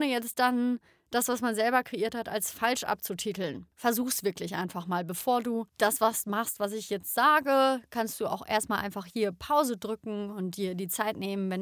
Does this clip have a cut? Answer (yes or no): yes